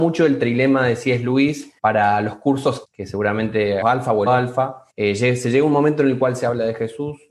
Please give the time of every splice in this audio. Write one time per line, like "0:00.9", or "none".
0:01.8
0:02.8
0:03.8
0:04.3
0:04.9